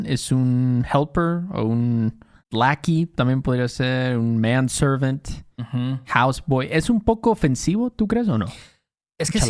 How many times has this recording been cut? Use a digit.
2